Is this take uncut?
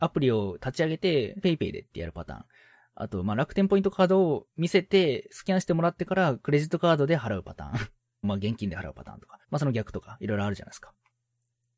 no; 4 cuts; at 1.4 s, 4.5 s, 8.2 s, 9.4 s

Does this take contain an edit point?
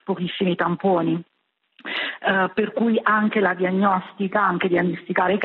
no; 0 cuts

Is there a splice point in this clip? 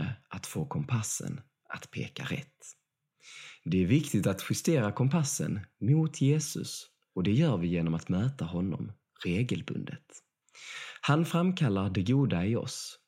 no; 0 cuts

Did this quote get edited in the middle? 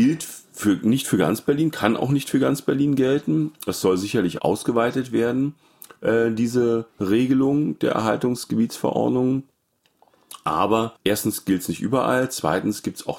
yes; 2 cuts; at 6.9 s, 11.0 s

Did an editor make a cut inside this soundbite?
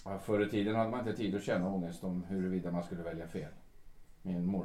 no; 0 cuts

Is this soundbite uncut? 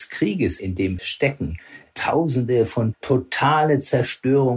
no; 2 cuts; at 1.0 s, 2.9 s

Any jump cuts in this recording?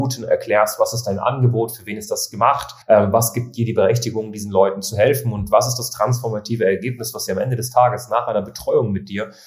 yes; 1 cut; at 2.8 s

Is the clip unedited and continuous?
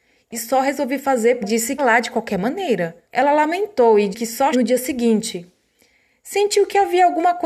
no; 5 cuts; at 1.4 s, 1.8 s, 3.0 s, 4.1 s, 4.5 s

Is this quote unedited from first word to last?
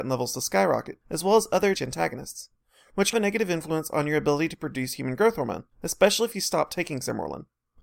no; 4 cuts; at 1.0 s, 1.7 s, 3.1 s, 5.7 s

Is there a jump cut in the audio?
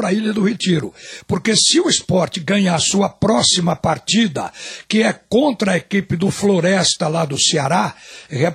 no; 0 cuts

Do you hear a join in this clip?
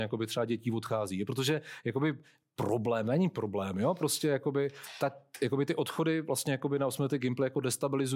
no; 0 cuts

